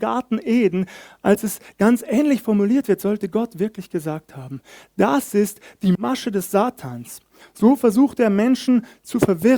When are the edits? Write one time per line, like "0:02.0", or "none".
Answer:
none